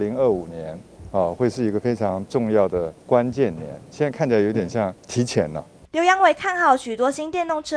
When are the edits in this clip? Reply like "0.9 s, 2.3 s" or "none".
3.0 s, 5.0 s, 5.9 s